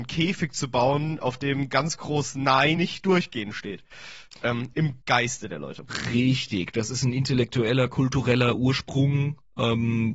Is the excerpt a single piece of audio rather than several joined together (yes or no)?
no